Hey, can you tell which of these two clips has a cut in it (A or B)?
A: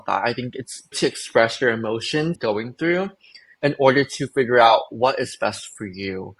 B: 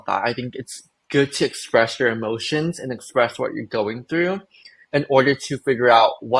A